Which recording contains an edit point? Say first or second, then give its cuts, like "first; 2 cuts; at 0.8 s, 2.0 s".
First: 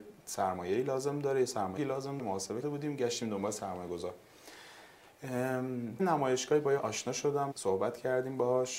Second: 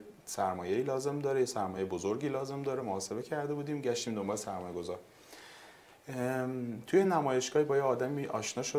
first; 6 cuts; at 1.8 s, 2.2 s, 2.6 s, 6.0 s, 6.8 s, 7.5 s